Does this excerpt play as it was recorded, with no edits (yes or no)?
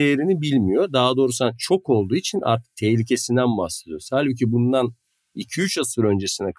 yes